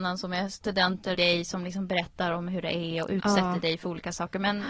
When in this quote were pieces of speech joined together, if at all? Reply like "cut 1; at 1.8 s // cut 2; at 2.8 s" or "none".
cut 1; at 1.1 s